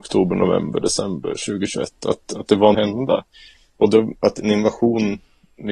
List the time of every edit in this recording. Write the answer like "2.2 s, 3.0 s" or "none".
2.7 s